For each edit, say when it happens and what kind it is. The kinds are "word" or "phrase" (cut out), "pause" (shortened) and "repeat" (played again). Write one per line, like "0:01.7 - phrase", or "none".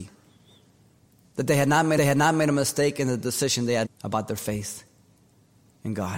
0:02.0 - repeat
0:03.8 - word

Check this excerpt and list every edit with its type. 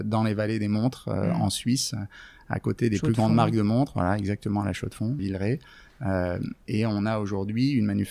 0:05.2 - word

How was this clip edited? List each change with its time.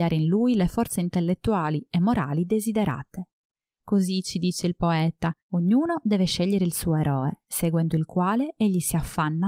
0:05.4 - pause

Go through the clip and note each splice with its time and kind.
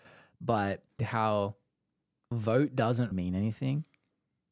0:01.0 - phrase
0:02.3 - word
0:03.1 - word

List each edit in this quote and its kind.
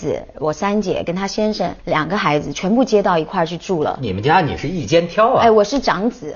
0:01.8 - pause

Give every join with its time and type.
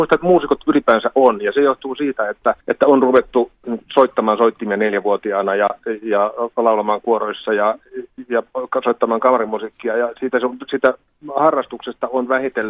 0:02.6 - pause

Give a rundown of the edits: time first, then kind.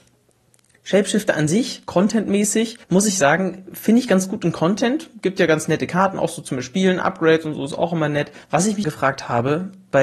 0:02.8 - pause
0:08.4 - pause
0:08.8 - word

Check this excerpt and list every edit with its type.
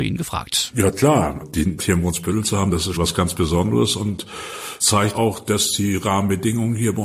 0:01.4 - word
0:01.8 - word
0:02.9 - word
0:04.8 - word
0:05.1 - word

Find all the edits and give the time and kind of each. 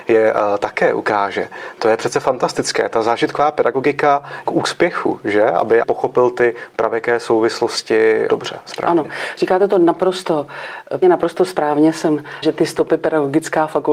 0:04.5 - phrase
0:05.8 - phrase
0:08.3 - word
0:11.0 - word
0:12.4 - word

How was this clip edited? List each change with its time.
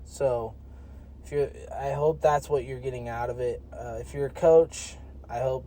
none

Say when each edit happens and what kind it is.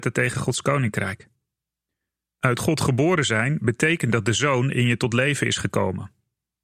none

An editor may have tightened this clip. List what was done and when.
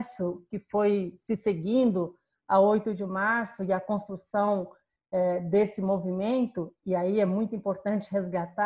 none

